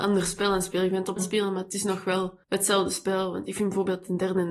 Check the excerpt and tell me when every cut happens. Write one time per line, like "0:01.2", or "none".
0:01.2
0:02.4